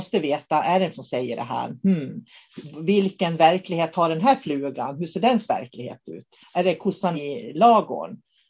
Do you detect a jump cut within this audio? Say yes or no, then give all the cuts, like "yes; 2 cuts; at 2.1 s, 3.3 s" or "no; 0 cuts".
yes; 3 cuts; at 0.9 s, 6.4 s, 7.1 s